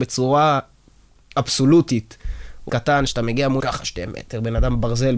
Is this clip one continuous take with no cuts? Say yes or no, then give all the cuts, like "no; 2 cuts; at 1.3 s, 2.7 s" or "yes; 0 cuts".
no; 2 cuts; at 2.7 s, 3.6 s